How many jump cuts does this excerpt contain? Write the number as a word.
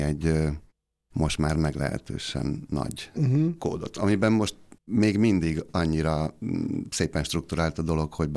one